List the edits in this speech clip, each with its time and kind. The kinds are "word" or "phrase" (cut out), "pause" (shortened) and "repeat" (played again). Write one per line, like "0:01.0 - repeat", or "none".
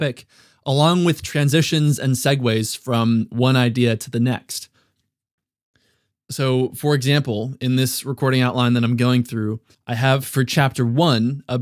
0:09.7 - pause